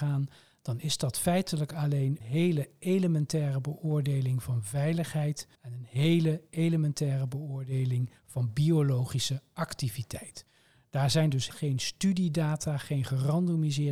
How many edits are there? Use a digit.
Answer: 3